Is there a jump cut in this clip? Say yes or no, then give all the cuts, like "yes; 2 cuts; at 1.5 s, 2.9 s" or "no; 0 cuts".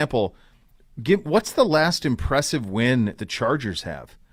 yes; 1 cut; at 3.2 s